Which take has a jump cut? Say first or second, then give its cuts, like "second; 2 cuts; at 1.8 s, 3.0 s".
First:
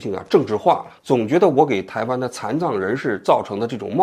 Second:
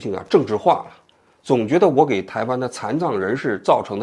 first; 1 cut; at 1.0 s